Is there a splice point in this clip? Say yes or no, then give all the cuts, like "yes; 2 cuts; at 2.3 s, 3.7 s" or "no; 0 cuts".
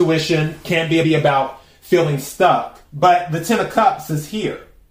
yes; 2 cuts; at 1.0 s, 2.8 s